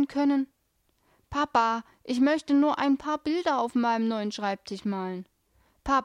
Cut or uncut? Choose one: uncut